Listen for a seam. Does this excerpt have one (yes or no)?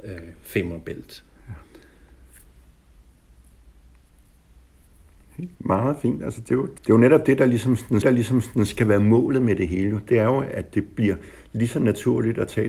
yes